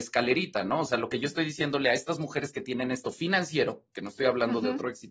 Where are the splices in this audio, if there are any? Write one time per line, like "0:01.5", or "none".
0:03.0